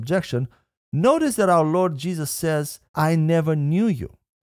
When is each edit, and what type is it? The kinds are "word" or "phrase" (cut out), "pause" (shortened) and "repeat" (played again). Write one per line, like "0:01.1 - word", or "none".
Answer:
0:02.9 - pause